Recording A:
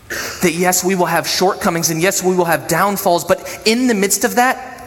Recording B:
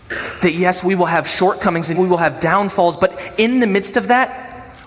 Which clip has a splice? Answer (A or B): B